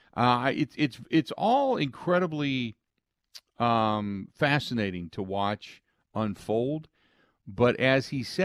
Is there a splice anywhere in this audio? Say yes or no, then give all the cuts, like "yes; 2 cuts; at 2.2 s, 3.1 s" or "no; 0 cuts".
no; 0 cuts